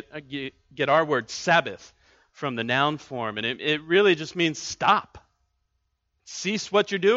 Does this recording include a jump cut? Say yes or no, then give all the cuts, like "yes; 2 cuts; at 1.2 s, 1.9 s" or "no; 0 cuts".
no; 0 cuts